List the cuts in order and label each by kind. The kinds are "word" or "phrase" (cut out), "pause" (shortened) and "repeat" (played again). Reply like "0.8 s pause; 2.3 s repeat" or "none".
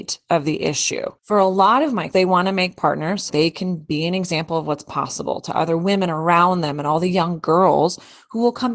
1.2 s pause; 2.1 s word; 3.3 s word